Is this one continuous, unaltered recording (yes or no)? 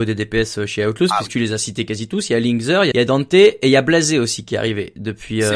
no